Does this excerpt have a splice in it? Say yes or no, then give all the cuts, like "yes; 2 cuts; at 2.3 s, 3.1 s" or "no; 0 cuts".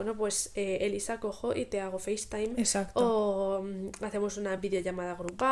no; 0 cuts